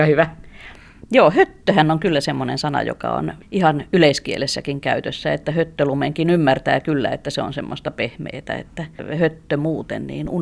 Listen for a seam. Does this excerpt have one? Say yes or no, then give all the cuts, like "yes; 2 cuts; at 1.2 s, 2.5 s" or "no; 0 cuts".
no; 0 cuts